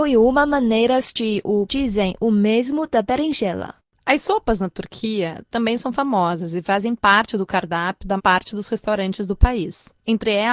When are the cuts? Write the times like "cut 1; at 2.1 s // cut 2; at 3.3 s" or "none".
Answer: cut 1; at 1.7 s // cut 2; at 8.2 s